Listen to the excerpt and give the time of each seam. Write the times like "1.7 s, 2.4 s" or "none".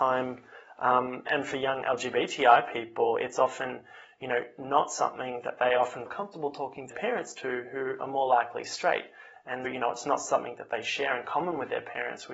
1.3 s, 6.1 s, 6.9 s, 9.6 s